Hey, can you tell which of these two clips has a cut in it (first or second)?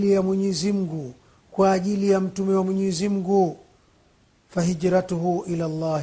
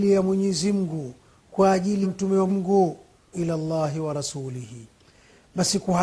second